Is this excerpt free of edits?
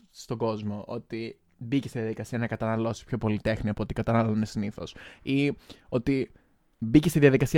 yes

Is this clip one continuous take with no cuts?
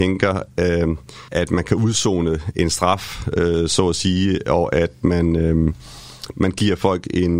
no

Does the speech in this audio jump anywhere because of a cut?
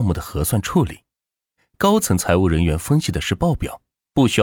no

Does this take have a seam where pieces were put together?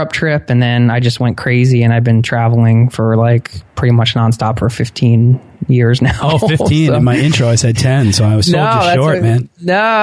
no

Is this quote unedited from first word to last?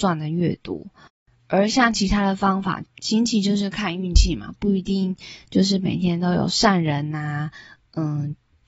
no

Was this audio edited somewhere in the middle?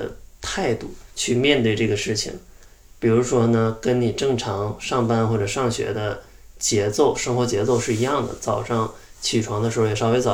yes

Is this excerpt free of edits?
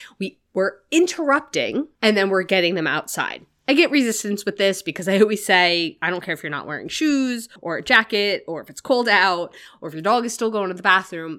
no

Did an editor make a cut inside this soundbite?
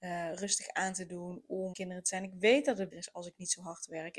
yes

